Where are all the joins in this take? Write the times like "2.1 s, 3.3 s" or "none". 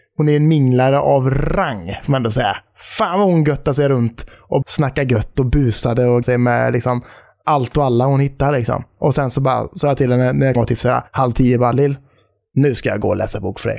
4.6 s, 6.2 s, 10.6 s, 11.1 s

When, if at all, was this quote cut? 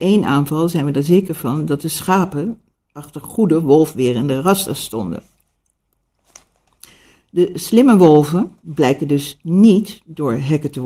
8.6 s

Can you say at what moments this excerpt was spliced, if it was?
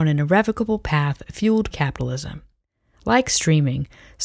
1.7 s

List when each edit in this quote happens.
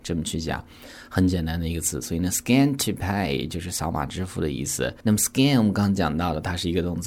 none

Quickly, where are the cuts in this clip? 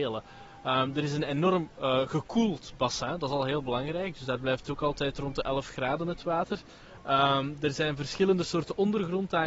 none

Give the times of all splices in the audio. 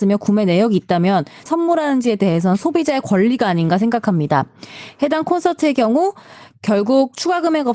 1.5 s

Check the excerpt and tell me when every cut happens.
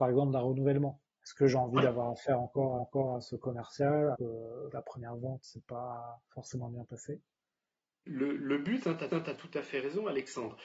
1.0 s, 2.8 s, 4.1 s, 4.7 s, 6.3 s, 8.1 s, 8.4 s, 9.1 s

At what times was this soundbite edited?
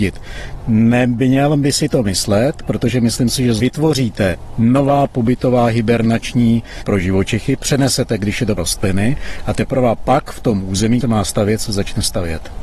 3.6 s, 6.8 s, 8.6 s, 11.0 s

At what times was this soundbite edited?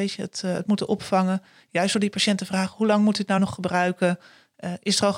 none

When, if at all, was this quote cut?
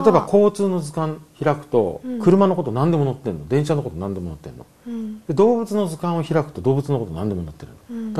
none

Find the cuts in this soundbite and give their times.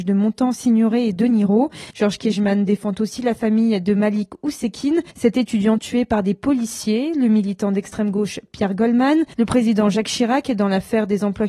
1.9 s, 5.1 s, 9.3 s

